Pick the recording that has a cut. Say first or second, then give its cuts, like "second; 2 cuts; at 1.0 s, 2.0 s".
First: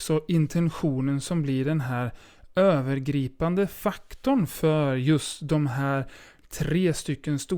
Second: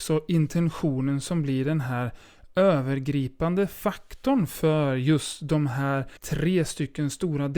second; 1 cut; at 6.2 s